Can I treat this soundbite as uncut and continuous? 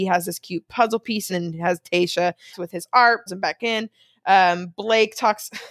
no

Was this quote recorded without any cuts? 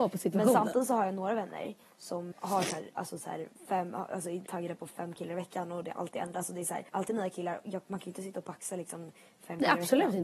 no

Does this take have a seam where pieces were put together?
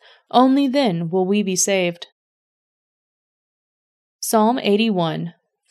no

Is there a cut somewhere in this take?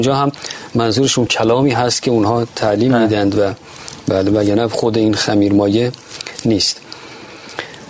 no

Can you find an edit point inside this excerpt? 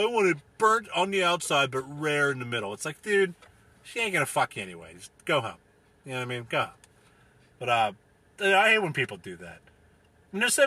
no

